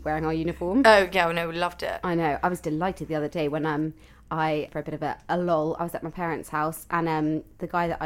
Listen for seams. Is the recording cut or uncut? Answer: cut